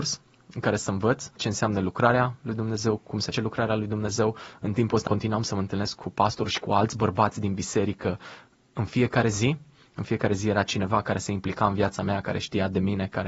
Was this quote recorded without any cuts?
no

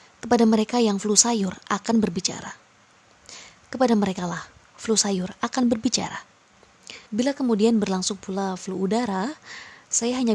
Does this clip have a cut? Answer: yes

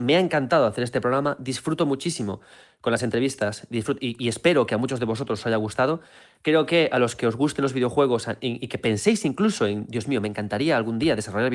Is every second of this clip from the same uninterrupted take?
yes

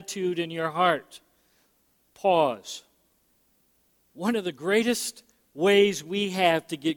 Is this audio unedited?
no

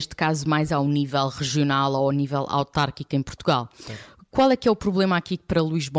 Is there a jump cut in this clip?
no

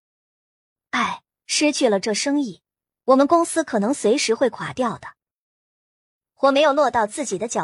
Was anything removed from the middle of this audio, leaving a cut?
no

